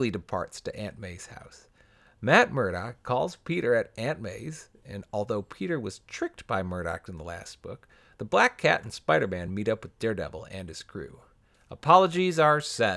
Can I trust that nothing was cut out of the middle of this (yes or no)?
yes